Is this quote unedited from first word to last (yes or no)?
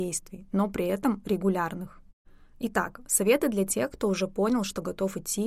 yes